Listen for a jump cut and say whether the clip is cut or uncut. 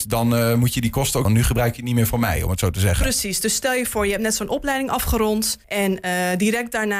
cut